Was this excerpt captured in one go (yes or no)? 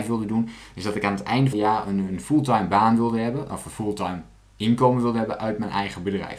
no